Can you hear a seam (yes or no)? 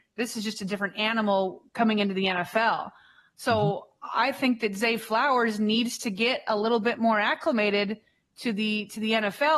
no